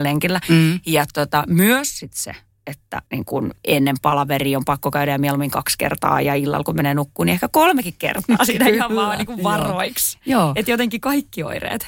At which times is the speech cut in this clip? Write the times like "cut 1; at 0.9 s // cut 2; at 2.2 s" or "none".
cut 1; at 3.1 s // cut 2; at 3.6 s